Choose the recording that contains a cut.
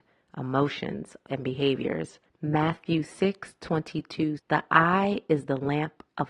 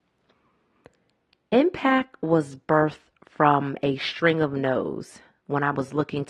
first; 3 cuts; at 1.3 s, 2.3 s, 4.4 s

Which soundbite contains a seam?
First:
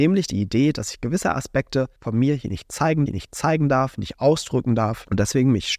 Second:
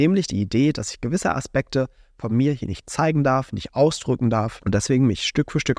first; 2 cuts; at 2.0 s, 3.1 s

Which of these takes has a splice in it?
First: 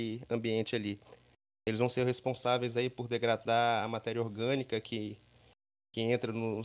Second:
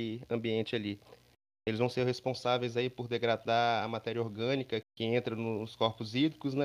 second; 1 cut; at 4.8 s

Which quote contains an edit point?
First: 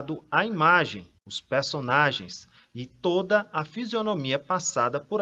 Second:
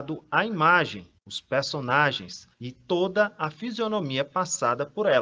second; 1 cut; at 2.5 s

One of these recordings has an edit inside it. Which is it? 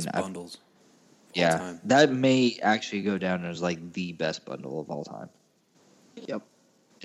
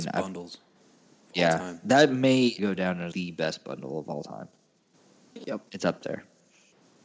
second; 3 cuts; at 2.6 s, 3.1 s, 5.7 s

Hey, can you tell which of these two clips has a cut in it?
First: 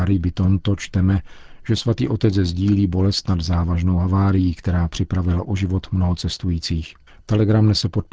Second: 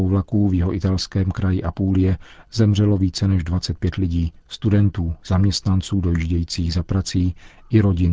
first; 1 cut; at 7.1 s

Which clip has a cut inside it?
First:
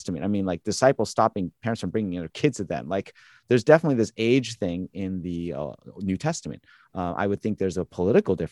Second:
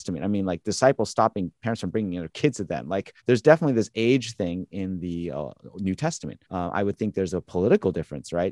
second; 2 cuts; at 3.2 s, 6.4 s

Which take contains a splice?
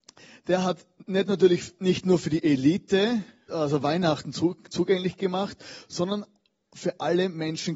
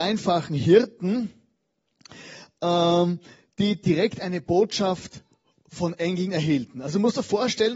first; 1 cut; at 3.5 s

